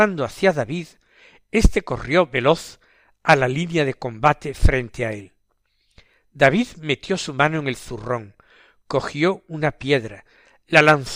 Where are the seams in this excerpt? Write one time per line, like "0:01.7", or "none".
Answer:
none